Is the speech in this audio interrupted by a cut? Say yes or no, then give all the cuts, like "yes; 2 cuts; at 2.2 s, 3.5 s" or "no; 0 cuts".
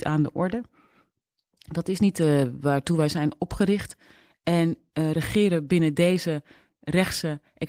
no; 0 cuts